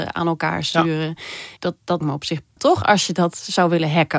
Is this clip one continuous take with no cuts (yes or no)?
no